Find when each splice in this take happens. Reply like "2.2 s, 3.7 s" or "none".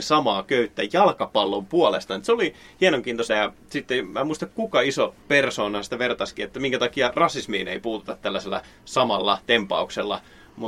3.3 s, 5.2 s